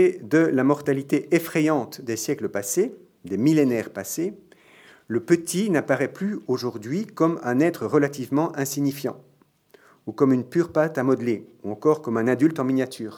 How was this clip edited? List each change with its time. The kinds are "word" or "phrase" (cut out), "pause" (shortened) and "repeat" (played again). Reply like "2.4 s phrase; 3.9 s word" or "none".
none